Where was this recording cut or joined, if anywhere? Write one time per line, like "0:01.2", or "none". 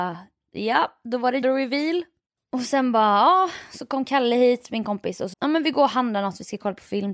0:01.4
0:05.3